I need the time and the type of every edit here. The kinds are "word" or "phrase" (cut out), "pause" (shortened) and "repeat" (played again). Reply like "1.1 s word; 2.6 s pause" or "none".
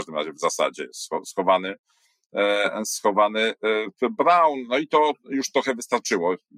none